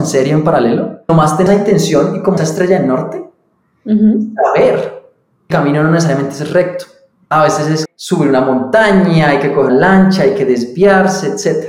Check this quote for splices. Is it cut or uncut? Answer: cut